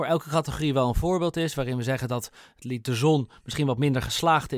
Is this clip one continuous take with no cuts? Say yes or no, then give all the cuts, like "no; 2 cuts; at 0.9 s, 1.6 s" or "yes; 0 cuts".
yes; 0 cuts